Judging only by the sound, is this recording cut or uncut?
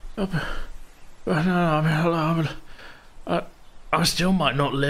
uncut